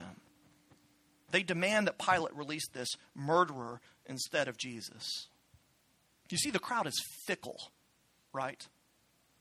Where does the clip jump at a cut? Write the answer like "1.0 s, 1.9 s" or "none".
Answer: none